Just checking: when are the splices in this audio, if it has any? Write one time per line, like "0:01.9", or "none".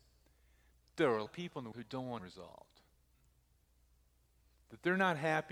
0:01.3
0:01.7
0:02.2